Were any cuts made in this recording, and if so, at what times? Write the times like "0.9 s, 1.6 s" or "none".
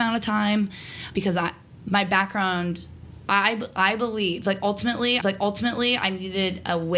1.1 s, 3.2 s, 5.2 s